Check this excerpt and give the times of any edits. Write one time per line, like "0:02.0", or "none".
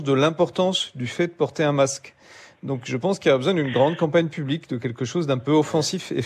none